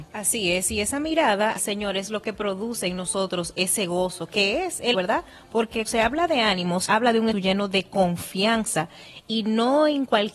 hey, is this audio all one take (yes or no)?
no